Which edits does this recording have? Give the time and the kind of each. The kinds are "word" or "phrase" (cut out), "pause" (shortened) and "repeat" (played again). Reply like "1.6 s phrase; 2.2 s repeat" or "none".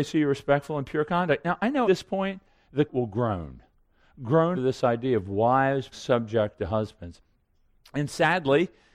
1.8 s word; 2.9 s word; 4.5 s word; 5.9 s word